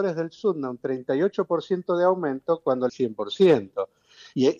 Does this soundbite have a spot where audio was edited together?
yes; 1 cut; at 2.9 s

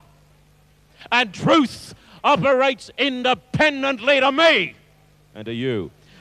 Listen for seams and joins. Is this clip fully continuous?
yes; 0 cuts

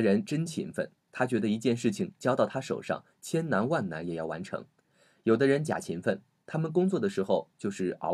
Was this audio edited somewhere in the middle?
no; 0 cuts

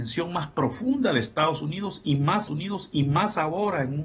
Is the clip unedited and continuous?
no; 1 cut; at 2.5 s

